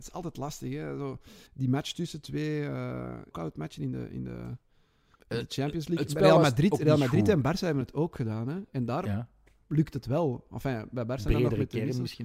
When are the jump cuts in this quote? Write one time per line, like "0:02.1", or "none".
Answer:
0:01.5
0:03.3